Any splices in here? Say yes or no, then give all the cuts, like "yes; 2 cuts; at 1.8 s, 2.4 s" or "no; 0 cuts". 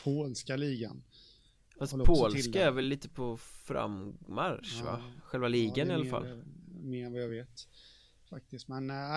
no; 0 cuts